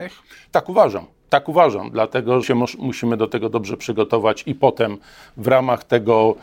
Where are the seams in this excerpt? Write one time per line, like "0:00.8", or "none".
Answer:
0:02.4